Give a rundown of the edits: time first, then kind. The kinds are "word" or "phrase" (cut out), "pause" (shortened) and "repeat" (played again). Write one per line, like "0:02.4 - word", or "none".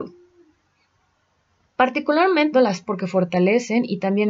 0:02.5 - word
0:02.8 - word